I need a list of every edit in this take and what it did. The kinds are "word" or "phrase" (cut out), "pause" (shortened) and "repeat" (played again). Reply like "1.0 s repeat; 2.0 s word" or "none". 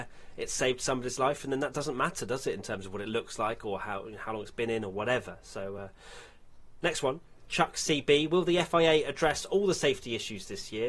none